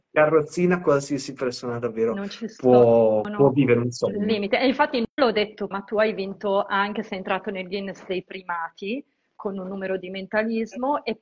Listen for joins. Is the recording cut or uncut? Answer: cut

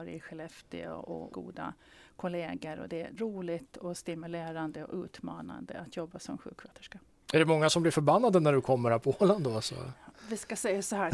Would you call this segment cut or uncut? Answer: cut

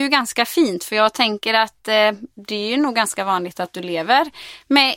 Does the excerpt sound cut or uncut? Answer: uncut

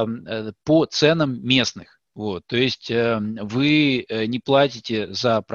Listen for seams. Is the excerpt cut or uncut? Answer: uncut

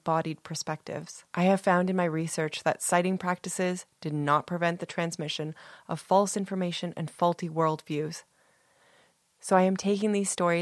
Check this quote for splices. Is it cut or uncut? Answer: cut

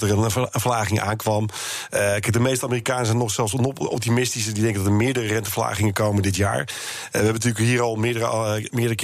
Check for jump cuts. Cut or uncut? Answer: uncut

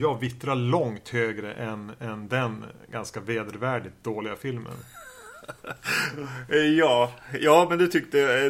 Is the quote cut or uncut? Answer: uncut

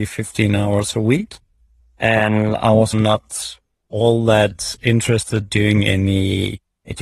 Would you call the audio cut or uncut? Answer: cut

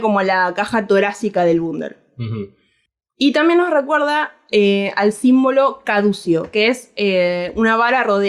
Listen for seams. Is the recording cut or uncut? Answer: uncut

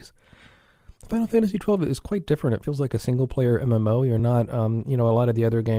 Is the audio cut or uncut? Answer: uncut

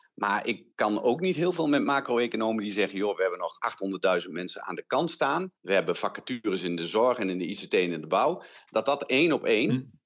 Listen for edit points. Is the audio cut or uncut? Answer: cut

